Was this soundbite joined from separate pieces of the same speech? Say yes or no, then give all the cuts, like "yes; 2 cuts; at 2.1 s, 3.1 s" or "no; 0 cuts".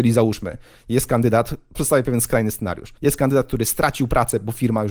yes; 2 cuts; at 1.7 s, 3.0 s